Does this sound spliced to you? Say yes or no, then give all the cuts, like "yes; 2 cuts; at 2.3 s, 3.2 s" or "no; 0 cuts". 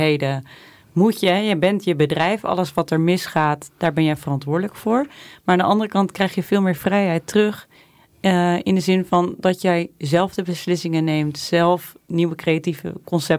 no; 0 cuts